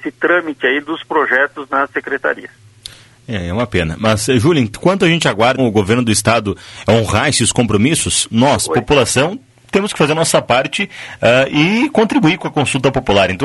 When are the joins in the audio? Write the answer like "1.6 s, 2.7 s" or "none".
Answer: 5.6 s